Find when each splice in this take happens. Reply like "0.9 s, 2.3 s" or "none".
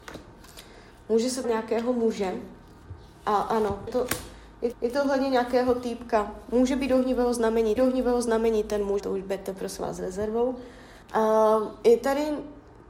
1.4 s, 3.9 s, 4.7 s, 7.8 s, 9.0 s, 11.0 s